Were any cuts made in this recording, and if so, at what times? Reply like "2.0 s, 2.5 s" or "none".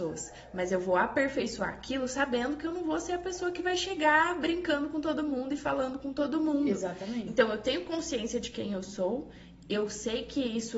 none

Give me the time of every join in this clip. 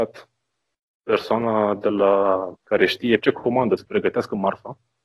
2.5 s, 3.2 s, 3.8 s

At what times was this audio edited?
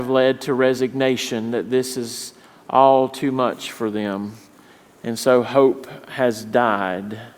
none

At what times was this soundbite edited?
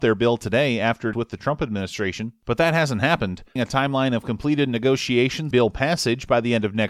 1.1 s, 3.6 s, 5.5 s

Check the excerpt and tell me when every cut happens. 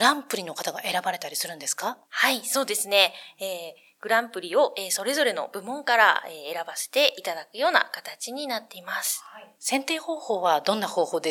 2.0 s, 9.5 s

